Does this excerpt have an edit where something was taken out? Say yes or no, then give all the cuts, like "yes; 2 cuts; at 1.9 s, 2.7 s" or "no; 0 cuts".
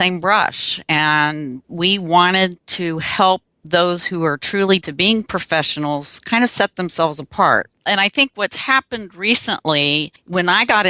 yes; 1 cut; at 4.8 s